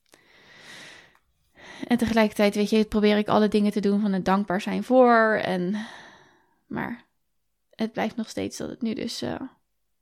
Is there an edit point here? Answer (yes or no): no